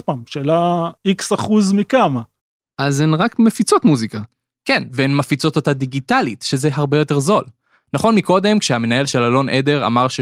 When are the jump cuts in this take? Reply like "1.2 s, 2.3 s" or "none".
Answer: 1.0 s